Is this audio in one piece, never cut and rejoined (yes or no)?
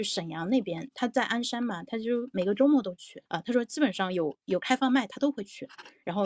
no